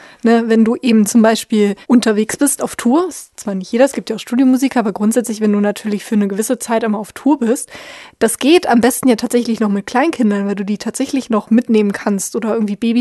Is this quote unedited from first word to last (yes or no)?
no